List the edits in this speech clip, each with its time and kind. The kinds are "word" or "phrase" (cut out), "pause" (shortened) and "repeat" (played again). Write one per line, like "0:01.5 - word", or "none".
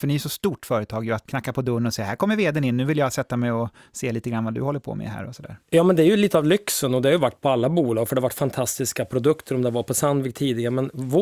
none